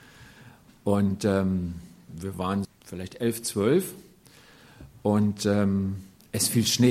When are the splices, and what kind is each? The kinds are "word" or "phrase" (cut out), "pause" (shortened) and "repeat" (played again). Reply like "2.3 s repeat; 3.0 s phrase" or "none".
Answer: 2.6 s word